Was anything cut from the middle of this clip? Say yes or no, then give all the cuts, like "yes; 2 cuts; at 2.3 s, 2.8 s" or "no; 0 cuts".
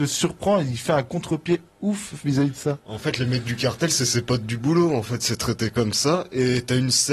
no; 0 cuts